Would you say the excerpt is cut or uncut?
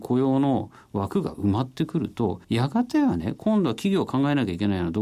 cut